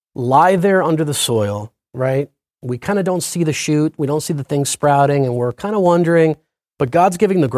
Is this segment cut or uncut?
uncut